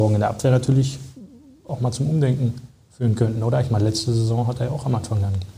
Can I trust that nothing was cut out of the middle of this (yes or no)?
yes